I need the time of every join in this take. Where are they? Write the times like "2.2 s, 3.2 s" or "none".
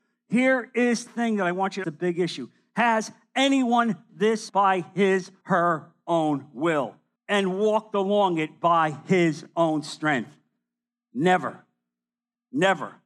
1.1 s, 1.8 s, 4.1 s, 4.5 s, 5.4 s, 7.2 s